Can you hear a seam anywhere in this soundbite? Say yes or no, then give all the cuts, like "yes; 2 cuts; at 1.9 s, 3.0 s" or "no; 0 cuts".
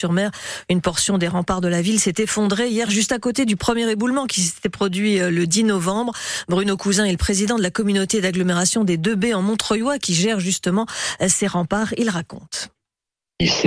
no; 0 cuts